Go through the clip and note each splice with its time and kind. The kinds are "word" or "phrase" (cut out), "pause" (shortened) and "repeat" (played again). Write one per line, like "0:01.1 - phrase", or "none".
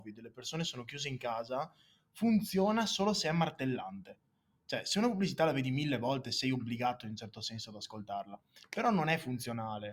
none